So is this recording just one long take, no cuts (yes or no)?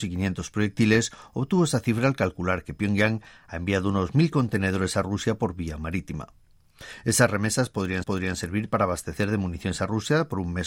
no